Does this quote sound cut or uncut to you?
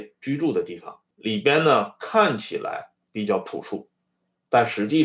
cut